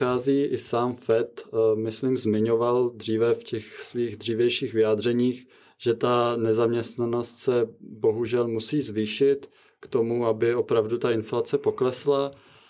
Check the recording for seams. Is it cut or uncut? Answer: uncut